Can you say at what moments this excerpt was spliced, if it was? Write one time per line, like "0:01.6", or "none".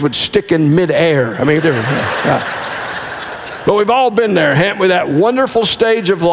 0:01.6